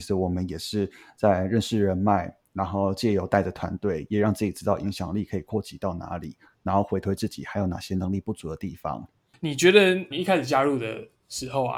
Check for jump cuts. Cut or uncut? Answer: cut